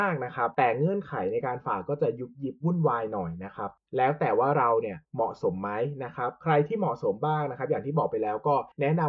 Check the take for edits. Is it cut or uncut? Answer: cut